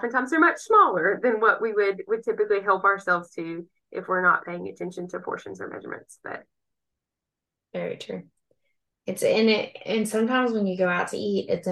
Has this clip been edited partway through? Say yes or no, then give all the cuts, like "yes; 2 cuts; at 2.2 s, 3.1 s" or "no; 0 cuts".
no; 0 cuts